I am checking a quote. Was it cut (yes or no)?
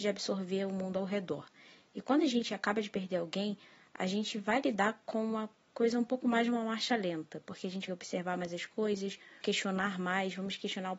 yes